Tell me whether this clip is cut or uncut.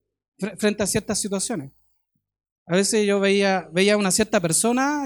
uncut